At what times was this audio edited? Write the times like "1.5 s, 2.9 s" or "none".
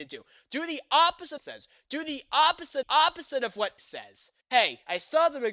1.4 s, 2.8 s, 3.8 s, 4.4 s